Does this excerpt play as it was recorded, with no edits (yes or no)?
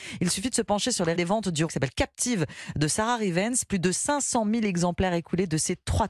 no